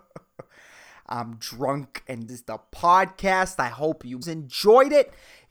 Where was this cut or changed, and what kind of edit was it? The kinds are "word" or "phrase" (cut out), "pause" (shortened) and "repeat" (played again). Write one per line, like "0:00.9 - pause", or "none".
0:02.3 - word
0:04.2 - word

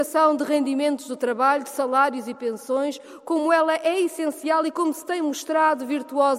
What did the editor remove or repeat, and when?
none

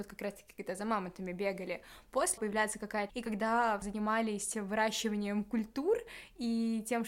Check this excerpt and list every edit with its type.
0:02.4 - phrase
0:03.1 - word
0:03.8 - word

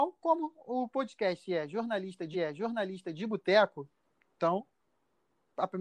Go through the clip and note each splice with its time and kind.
0:02.3 - repeat

